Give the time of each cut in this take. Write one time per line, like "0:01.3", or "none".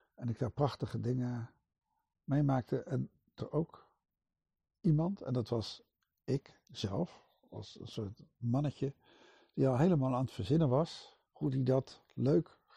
0:03.4
0:11.3

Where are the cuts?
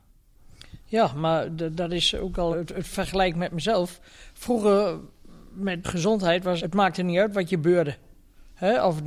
0:02.5
0:05.8
0:06.6

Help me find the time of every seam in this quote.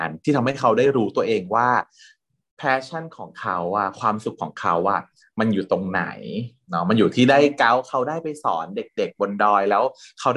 none

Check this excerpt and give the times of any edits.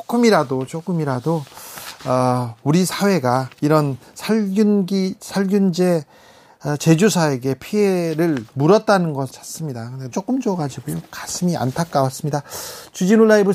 0:03.5
0:08.5
0:09.3
0:10.1

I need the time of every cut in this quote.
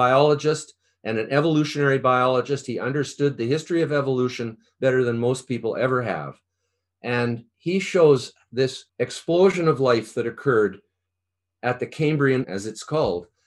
0:08.9
0:12.4

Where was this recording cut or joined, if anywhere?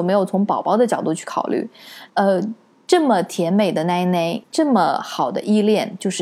0:02.1
0:04.4

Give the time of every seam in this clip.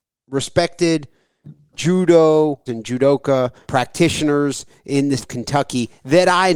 0:02.7
0:03.6
0:05.2

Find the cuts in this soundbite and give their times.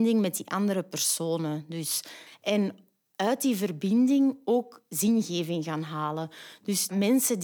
none

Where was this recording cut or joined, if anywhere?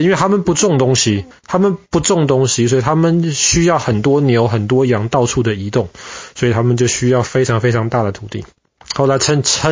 0:01.3
0:08.5

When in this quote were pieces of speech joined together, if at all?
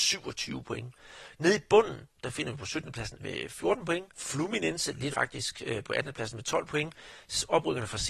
0:03.2
0:04.1
0:05.1

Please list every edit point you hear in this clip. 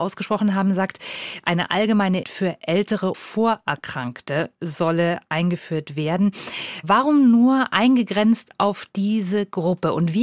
0:02.2
0:03.1

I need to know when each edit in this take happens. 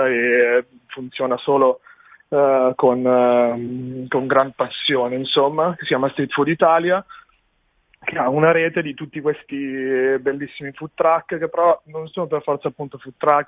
none

